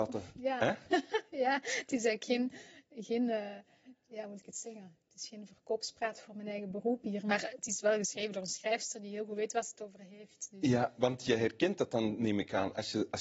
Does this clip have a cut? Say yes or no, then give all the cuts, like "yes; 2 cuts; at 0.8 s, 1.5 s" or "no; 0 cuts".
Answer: yes; 1 cut; at 5.0 s